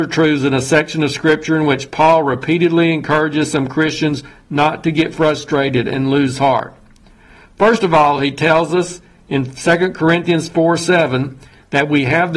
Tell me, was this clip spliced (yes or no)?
no